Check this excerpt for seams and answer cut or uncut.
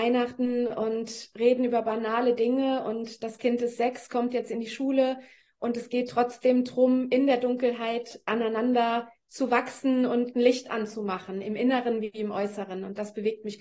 uncut